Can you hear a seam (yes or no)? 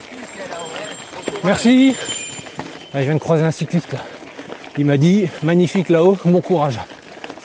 no